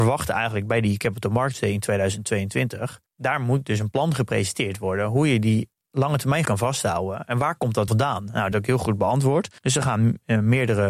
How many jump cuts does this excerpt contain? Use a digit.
5